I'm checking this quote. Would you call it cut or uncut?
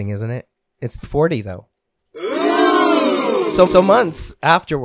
cut